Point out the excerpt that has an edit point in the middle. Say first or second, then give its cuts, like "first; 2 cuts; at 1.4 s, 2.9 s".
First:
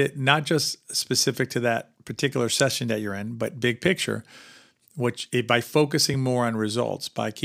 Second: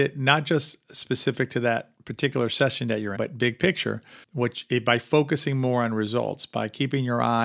second; 2 cuts; at 3.2 s, 4.2 s